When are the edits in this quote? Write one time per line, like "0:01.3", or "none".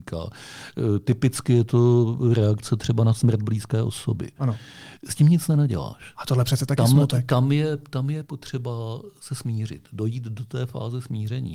none